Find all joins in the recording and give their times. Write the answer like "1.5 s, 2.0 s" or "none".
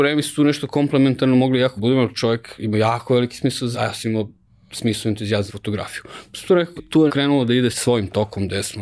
1.8 s, 3.7 s, 5.5 s, 6.8 s, 7.1 s, 7.7 s